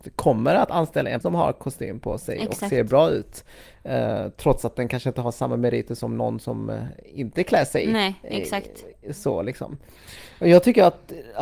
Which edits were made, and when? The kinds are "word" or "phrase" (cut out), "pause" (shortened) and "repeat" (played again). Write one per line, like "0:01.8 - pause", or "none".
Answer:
0:01.2 - word